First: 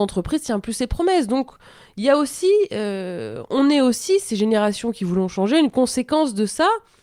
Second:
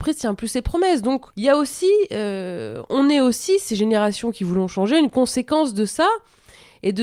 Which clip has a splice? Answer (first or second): second